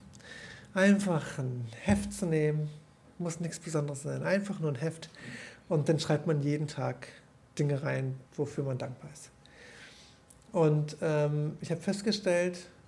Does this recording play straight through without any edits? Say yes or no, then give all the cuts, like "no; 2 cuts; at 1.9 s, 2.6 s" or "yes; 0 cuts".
no; 1 cut; at 8.3 s